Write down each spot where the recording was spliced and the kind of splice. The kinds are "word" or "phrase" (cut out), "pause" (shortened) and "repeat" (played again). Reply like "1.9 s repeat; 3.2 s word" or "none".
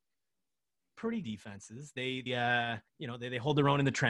1.2 s word; 2.3 s word; 2.9 s pause